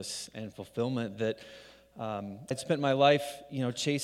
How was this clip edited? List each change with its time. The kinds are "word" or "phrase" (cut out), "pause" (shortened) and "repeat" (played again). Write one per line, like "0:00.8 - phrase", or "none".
0:02.5 - word